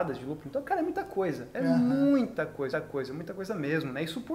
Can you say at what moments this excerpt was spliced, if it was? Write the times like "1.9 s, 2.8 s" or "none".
2.7 s